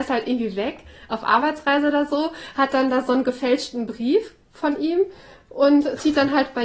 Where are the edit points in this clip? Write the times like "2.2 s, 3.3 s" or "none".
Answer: none